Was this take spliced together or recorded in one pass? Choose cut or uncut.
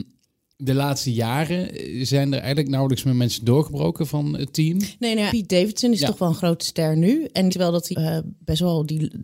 cut